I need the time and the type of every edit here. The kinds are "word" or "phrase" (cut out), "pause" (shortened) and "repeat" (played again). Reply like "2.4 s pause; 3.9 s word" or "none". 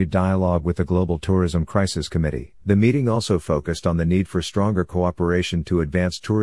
2.6 s pause